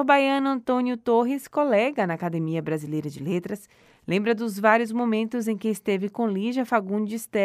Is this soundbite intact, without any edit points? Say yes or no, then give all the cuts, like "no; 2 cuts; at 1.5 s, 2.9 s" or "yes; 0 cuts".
yes; 0 cuts